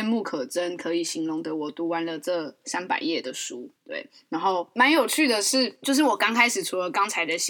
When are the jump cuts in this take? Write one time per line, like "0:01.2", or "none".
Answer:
0:03.8